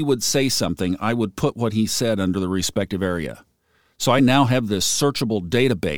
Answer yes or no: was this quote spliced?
no